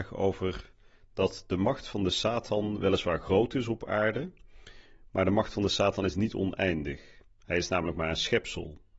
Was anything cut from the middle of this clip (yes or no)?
no